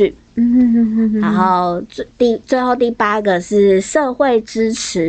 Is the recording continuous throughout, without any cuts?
yes; 0 cuts

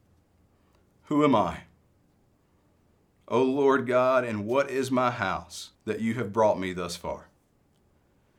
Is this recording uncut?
no; 1 cut; at 5.7 s

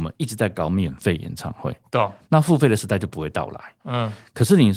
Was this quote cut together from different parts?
no; 0 cuts

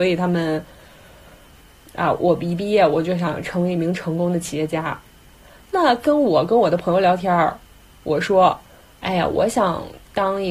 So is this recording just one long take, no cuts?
yes; 0 cuts

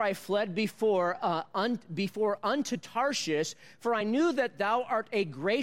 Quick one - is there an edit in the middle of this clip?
no; 0 cuts

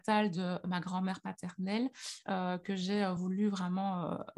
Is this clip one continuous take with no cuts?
yes; 0 cuts

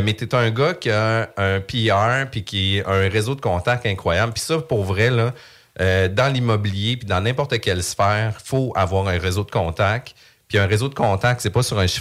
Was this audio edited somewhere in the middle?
no; 0 cuts

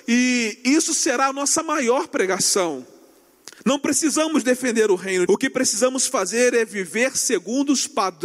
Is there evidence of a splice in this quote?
yes; 2 cuts; at 3.6 s, 5.3 s

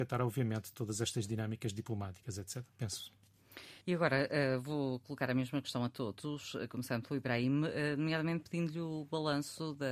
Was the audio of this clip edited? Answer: yes; 1 cut; at 3.8 s

